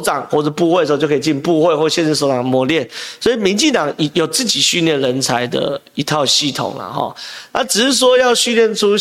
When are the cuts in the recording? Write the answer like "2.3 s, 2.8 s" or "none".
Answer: none